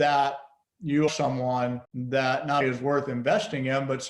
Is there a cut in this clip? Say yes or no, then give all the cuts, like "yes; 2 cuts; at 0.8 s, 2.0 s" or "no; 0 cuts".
yes; 3 cuts; at 1.1 s, 1.8 s, 2.6 s